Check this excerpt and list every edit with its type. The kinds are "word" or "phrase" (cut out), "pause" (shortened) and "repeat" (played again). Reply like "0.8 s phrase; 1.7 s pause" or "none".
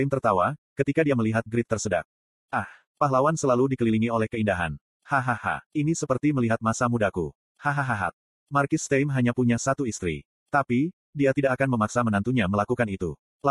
none